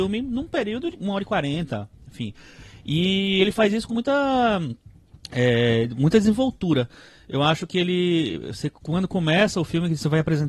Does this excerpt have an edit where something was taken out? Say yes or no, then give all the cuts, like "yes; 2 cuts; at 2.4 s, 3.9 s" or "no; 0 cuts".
yes; 2 cuts; at 0.9 s, 3.9 s